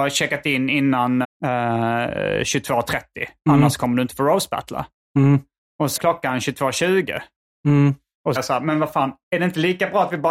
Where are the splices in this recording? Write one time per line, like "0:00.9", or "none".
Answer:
0:01.2
0:06.0
0:08.4